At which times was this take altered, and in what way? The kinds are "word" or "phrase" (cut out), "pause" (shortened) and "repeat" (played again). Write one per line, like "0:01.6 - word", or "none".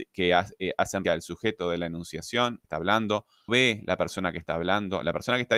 0:01.0 - word
0:02.6 - phrase
0:03.5 - word